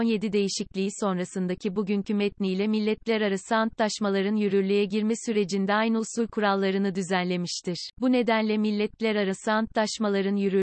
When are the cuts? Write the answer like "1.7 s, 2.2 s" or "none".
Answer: 7.9 s